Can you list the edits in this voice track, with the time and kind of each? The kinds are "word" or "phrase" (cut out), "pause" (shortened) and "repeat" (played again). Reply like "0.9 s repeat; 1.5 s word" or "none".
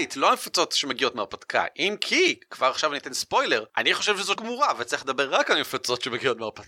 3.7 s pause; 4.4 s word